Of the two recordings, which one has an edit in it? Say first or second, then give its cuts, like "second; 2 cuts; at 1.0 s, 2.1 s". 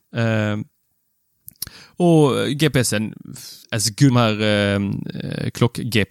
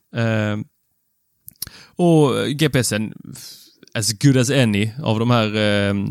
first; 2 cuts; at 3.6 s, 4.1 s